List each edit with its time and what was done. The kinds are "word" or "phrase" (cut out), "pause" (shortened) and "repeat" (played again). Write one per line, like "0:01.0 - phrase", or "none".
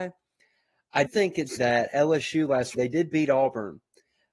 0:01.1 - word
0:01.6 - word
0:02.7 - word